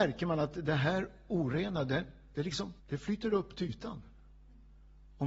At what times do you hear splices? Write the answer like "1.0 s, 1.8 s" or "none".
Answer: 2.8 s